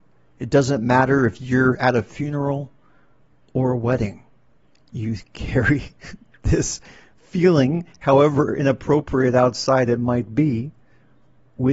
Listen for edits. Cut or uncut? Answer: uncut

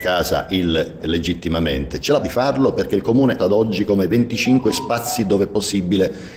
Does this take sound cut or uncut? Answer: cut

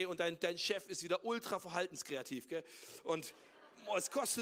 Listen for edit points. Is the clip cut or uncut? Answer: uncut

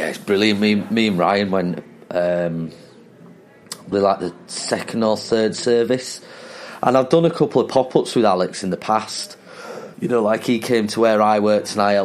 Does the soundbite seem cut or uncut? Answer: cut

